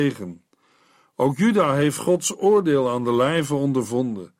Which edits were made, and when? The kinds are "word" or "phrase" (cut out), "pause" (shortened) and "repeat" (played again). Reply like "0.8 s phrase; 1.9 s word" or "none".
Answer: none